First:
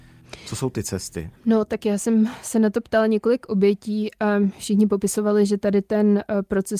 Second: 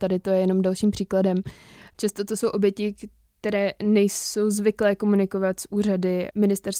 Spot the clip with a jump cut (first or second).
first